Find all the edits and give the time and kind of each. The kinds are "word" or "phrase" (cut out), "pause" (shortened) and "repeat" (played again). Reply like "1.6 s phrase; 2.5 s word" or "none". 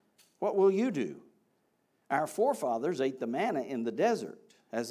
none

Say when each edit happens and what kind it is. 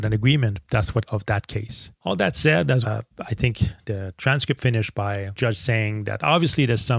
1.1 s phrase; 2.0 s pause; 2.8 s word; 4.6 s word; 5.4 s word

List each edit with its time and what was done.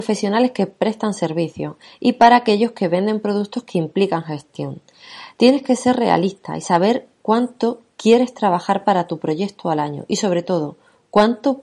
none

